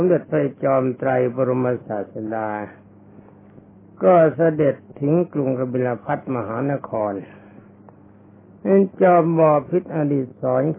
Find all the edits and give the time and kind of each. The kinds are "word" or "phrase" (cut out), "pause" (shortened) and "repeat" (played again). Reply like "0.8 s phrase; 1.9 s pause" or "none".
none